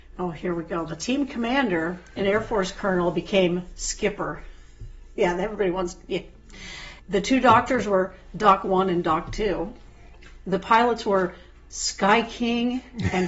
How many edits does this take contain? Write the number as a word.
one